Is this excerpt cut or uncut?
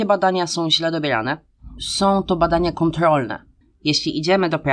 cut